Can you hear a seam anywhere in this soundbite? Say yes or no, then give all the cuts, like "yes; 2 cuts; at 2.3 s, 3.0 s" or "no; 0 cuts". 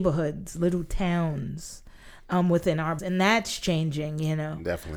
yes; 1 cut; at 3.0 s